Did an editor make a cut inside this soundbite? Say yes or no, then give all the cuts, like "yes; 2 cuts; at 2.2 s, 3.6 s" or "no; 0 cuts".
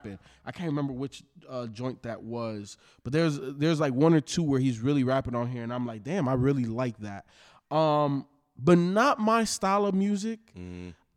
no; 0 cuts